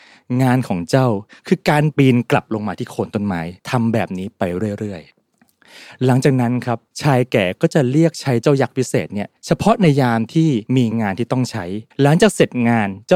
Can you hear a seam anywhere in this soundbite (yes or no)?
yes